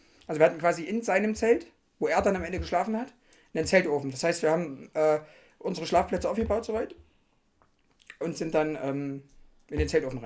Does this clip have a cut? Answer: yes; 1 cut; at 8.2 s

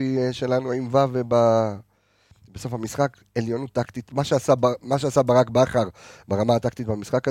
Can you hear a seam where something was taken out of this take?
no; 0 cuts

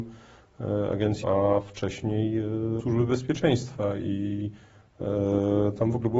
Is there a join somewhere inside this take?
yes; 2 cuts; at 1.2 s, 2.8 s

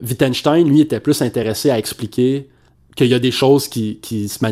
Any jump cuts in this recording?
yes; 1 cut; at 2.7 s

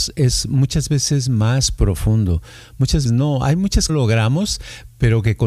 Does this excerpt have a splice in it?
yes; 2 cuts; at 3.1 s, 3.9 s

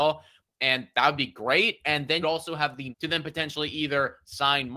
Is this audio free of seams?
no; 2 cuts; at 2.2 s, 2.9 s

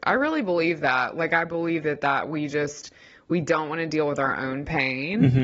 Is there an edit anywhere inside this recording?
no; 0 cuts

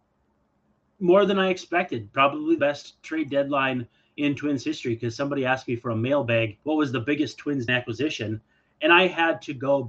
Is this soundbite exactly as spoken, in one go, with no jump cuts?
no; 3 cuts; at 2.6 s, 6.6 s, 7.7 s

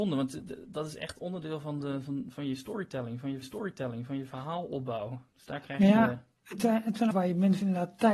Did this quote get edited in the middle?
yes; 2 cuts; at 3.4 s, 7.1 s

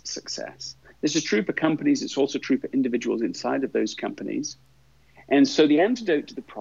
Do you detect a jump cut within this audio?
no; 0 cuts

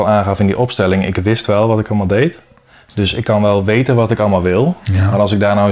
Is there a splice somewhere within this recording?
no; 0 cuts

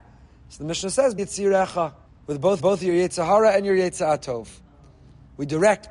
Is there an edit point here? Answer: yes; 3 cuts; at 1.2 s, 2.1 s, 2.6 s

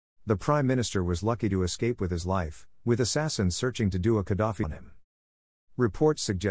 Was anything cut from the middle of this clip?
yes; 1 cut; at 4.6 s

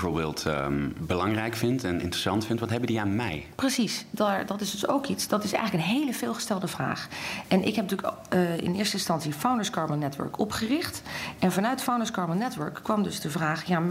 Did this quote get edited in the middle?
no; 0 cuts

